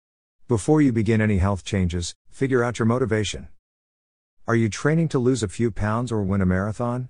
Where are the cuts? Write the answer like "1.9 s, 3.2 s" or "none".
none